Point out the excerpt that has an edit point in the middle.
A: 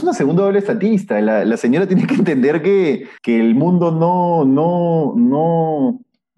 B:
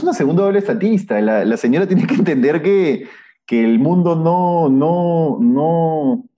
A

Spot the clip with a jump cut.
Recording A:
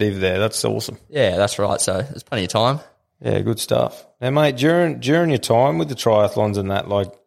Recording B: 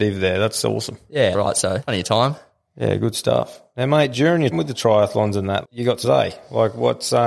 B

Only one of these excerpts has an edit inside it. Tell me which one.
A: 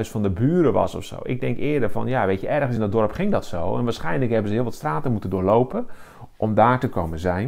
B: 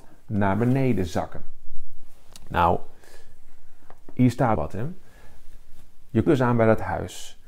B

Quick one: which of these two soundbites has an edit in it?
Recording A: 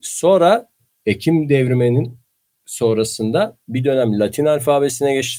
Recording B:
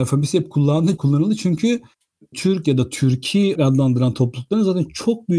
B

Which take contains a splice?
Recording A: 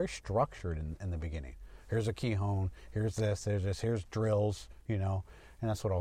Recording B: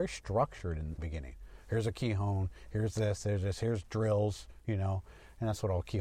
B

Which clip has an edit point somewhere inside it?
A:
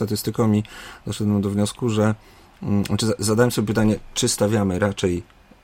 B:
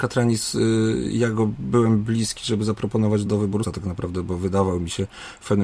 B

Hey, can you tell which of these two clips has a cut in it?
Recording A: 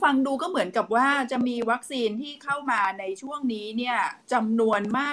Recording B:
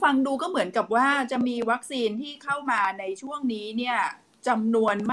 A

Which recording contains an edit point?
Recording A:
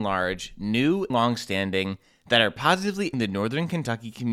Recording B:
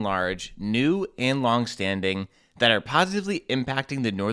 A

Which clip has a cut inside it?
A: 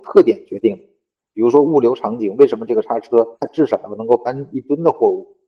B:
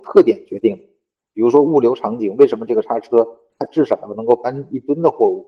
A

